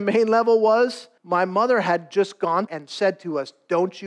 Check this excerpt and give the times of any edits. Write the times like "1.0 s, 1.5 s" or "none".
1.2 s, 2.7 s